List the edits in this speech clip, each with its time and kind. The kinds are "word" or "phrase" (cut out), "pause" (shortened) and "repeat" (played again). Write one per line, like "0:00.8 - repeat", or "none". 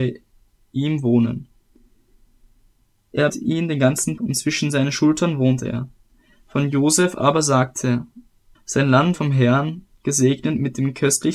0:03.3 - word
0:04.2 - word
0:08.5 - word
0:09.1 - word